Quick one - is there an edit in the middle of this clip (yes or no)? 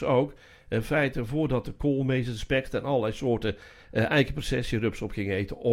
no